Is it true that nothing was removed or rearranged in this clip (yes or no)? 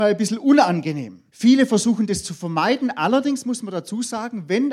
no